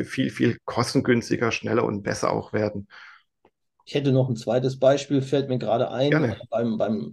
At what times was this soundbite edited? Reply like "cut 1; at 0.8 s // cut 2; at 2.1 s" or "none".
none